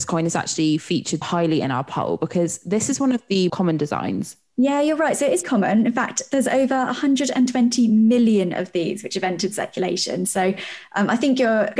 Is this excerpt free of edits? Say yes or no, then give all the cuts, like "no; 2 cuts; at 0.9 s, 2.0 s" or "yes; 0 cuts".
no; 3 cuts; at 1.2 s, 3.5 s, 5.4 s